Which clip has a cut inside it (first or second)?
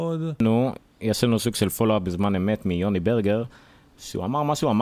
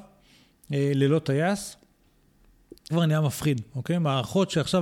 second